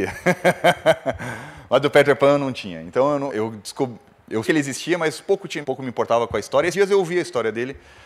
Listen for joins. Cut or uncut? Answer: cut